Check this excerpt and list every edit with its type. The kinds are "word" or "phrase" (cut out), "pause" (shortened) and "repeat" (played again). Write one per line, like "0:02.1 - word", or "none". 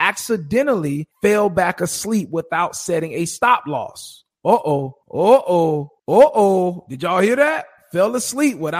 0:01.1 - pause
0:05.0 - pause
0:06.0 - pause